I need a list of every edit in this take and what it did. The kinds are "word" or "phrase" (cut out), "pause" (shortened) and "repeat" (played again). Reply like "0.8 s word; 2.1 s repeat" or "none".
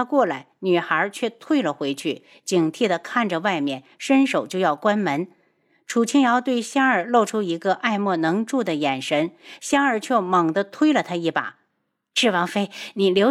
none